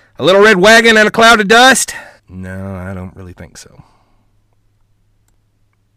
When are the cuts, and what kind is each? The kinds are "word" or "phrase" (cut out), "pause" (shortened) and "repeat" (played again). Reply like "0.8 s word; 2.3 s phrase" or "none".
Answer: 2.2 s pause